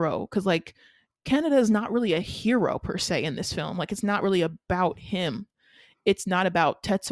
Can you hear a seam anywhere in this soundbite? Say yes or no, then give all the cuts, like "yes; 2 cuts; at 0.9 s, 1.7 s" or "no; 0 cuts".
no; 0 cuts